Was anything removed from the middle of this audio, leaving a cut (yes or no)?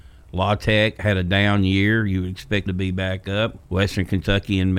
yes